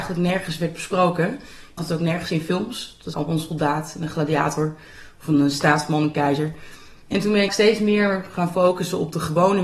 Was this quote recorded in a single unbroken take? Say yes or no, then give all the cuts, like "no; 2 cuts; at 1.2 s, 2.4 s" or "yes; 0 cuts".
no; 3 cuts; at 1.8 s, 3.1 s, 7.5 s